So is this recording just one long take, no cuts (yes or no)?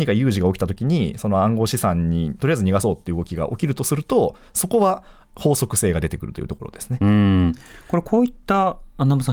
yes